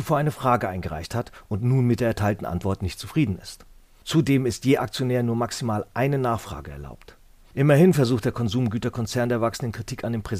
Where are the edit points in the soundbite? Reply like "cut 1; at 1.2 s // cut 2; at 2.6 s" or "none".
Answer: none